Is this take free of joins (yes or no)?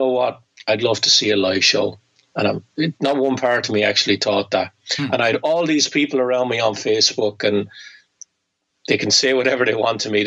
yes